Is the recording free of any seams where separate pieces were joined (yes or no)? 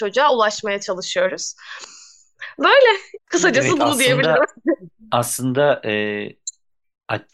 no